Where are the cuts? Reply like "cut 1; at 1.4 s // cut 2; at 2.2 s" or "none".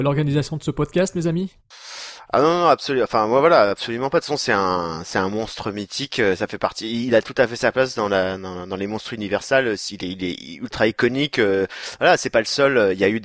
none